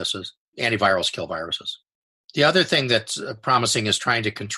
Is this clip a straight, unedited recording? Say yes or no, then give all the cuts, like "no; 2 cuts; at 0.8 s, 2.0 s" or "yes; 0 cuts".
yes; 0 cuts